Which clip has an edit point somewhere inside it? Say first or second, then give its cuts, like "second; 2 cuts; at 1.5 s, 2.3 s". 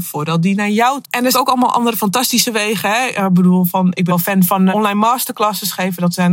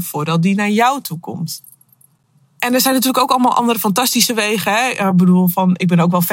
first; 4 cuts; at 1.0 s, 1.3 s, 4.1 s, 4.7 s